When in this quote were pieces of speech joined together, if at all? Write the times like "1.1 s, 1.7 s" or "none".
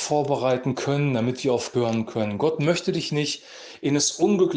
1.7 s